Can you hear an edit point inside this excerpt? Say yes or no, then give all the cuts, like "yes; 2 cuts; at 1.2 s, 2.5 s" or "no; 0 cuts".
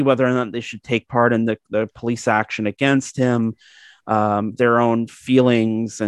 no; 0 cuts